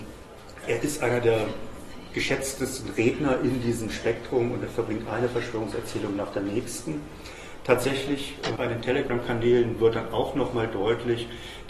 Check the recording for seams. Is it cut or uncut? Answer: cut